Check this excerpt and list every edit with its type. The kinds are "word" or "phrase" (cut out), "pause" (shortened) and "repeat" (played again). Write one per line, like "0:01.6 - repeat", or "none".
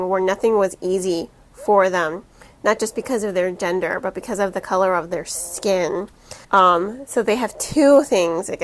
0:06.4 - pause

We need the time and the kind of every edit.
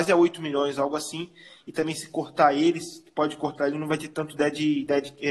none

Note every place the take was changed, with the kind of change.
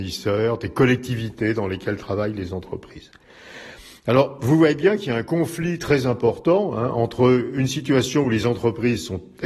none

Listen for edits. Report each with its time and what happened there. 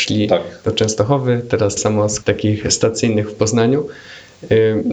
0:01.8 - word
0:02.2 - word

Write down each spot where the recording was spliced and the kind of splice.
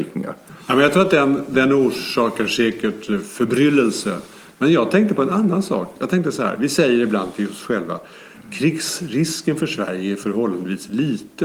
none

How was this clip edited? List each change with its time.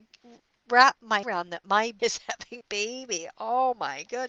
0:01.2 - word
0:02.0 - word
0:02.6 - word

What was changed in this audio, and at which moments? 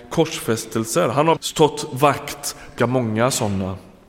0:01.4 - word
0:02.8 - word

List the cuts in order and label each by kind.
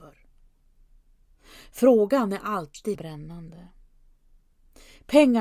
0:02.9 - word

